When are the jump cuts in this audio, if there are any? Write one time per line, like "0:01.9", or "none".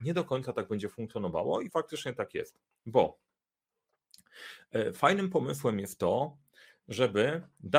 0:01.7